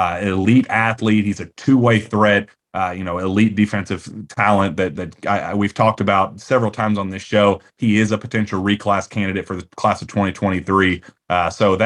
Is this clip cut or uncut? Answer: uncut